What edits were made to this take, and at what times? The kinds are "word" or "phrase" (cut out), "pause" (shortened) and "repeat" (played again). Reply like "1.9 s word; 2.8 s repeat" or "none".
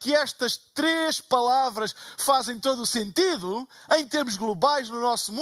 none